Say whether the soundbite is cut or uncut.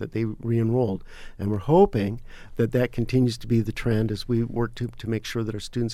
uncut